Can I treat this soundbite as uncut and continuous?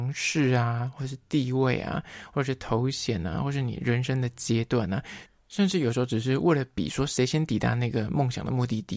yes; 0 cuts

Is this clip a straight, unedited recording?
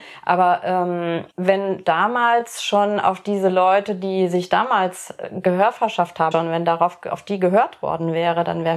no; 2 cuts; at 1.3 s, 6.3 s

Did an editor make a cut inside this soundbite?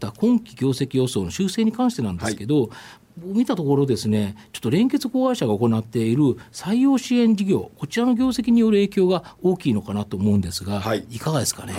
no; 0 cuts

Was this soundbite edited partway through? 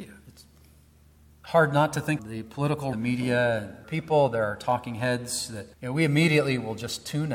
yes; 4 cuts; at 2.2 s, 2.9 s, 3.8 s, 5.7 s

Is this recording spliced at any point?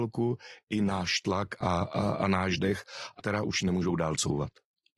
yes; 1 cut; at 3.2 s

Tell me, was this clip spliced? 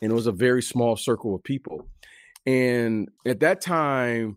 yes; 1 cut; at 3.2 s

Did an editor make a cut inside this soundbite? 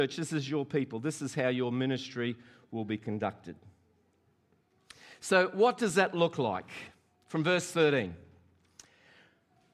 no; 0 cuts

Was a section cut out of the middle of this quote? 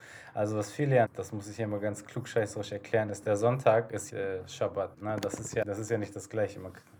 yes; 4 cuts; at 1.1 s, 4.1 s, 4.9 s, 5.6 s

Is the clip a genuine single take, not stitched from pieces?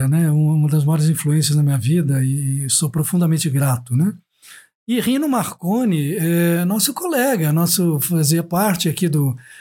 yes; 0 cuts

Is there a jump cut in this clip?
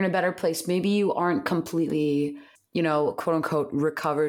yes; 1 cut; at 2.6 s

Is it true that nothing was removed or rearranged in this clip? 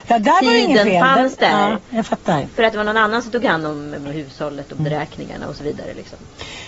no; 2 cuts; at 4.0 s, 4.8 s

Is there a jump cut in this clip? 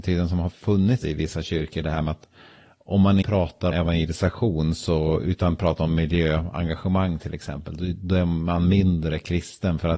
yes; 3 cuts; at 1.0 s, 3.2 s, 3.7 s

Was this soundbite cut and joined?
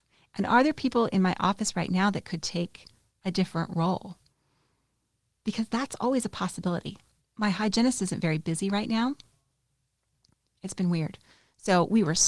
no; 0 cuts

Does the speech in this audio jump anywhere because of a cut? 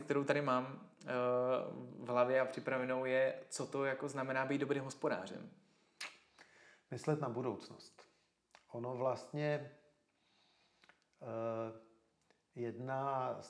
no; 0 cuts

